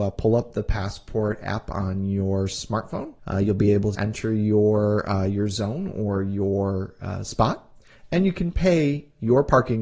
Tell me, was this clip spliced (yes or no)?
yes